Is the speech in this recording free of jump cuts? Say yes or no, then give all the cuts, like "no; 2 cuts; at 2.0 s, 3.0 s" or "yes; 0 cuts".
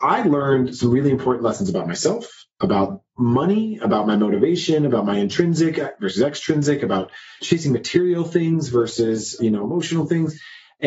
yes; 0 cuts